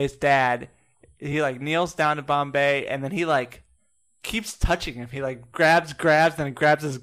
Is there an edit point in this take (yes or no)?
no